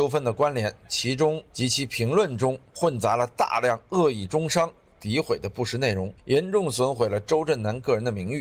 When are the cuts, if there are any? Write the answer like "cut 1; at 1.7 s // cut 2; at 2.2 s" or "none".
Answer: cut 1; at 6.2 s